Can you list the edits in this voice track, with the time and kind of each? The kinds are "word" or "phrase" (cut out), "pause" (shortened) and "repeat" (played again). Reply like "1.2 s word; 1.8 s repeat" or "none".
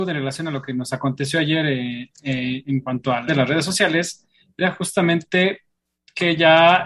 3.3 s word